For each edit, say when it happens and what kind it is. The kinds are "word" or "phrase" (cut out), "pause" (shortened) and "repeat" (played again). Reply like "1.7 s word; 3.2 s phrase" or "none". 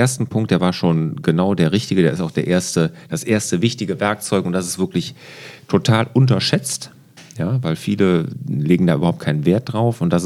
none